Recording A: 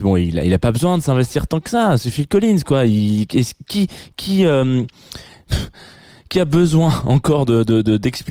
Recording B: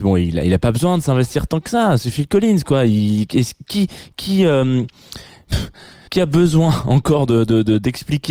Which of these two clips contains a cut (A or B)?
B